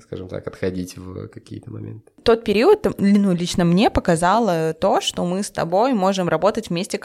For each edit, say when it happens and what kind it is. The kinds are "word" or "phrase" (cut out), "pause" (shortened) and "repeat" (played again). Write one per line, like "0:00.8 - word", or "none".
none